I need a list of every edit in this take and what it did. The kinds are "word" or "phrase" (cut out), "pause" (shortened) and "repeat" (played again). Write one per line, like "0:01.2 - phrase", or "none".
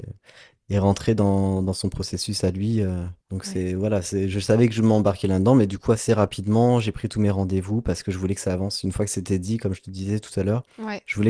0:03.2 - pause